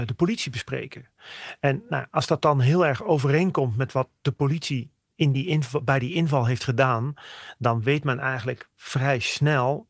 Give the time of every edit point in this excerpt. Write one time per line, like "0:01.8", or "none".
none